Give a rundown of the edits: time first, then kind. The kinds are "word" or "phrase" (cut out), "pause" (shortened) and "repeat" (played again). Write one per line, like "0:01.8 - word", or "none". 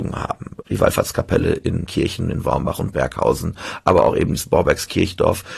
0:01.9 - phrase